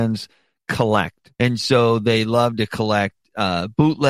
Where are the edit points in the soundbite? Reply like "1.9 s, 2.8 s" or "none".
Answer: 1.3 s